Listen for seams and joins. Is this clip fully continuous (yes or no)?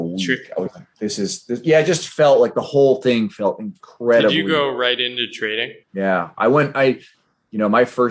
no